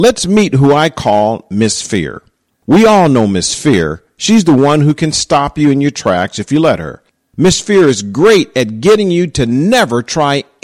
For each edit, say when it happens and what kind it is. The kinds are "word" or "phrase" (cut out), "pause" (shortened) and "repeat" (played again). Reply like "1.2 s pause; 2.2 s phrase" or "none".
none